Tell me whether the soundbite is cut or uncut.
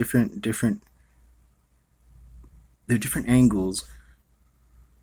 uncut